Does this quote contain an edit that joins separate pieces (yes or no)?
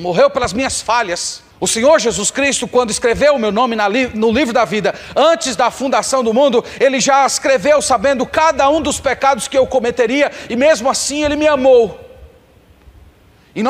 yes